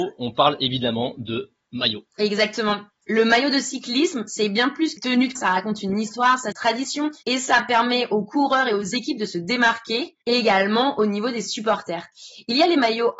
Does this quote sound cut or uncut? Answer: cut